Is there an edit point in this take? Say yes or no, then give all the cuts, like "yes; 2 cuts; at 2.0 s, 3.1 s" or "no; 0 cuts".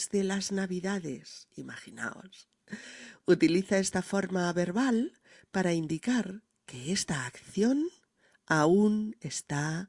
no; 0 cuts